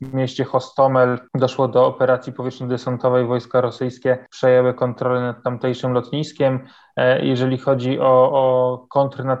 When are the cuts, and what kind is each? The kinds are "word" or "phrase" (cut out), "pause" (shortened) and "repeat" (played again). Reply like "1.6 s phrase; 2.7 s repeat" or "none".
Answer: none

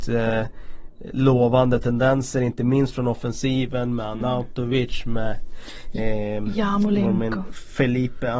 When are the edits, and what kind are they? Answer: none

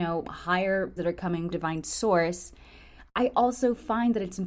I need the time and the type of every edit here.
1.0 s word; 1.5 s word

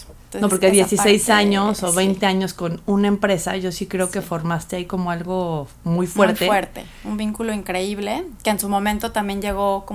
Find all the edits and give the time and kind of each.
none

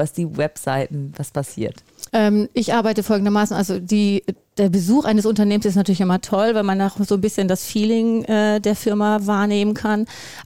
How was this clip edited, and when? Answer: 2.1 s pause

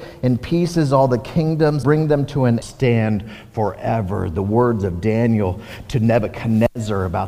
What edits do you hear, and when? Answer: 1.8 s word; 2.6 s phrase

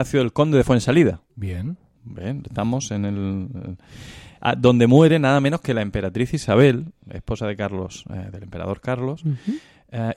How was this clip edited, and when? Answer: 1.3 s pause

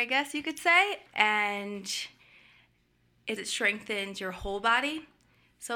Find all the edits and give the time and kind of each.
3.4 s phrase

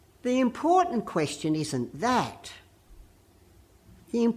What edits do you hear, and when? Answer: none

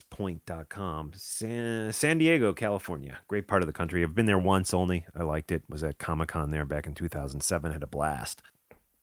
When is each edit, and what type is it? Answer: none

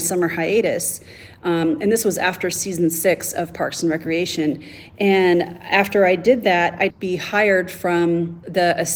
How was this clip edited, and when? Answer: 6.9 s phrase

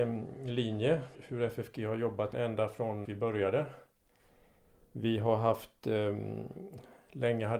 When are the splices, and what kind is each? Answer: 1.1 s word; 2.3 s word; 3.0 s word

